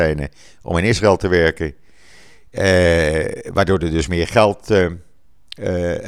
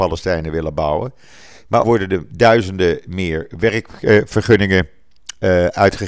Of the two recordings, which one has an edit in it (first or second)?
second